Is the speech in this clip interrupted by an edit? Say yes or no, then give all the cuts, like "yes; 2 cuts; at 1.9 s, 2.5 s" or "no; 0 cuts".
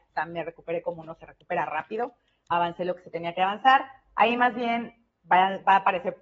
no; 0 cuts